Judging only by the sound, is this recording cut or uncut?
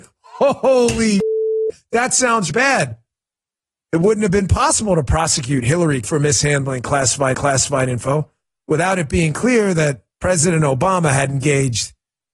cut